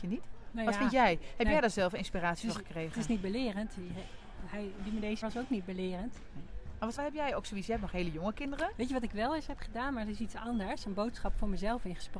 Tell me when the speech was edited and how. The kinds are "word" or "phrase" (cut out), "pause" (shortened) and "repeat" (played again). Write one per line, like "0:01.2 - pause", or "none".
0:05.2 - word
0:07.0 - word